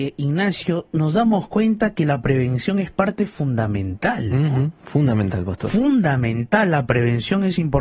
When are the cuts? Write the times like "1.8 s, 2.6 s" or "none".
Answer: none